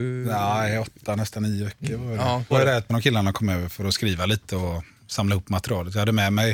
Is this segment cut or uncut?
cut